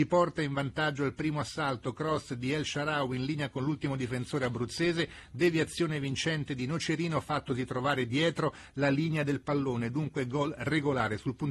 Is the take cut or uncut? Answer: uncut